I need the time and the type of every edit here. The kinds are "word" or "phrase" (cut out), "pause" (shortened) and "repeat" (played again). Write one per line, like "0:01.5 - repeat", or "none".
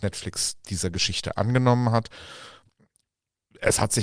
none